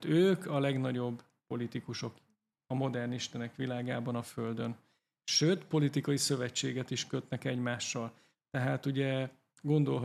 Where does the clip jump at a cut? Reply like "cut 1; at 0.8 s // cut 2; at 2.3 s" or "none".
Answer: none